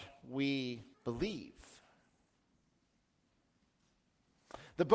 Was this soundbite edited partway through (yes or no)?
yes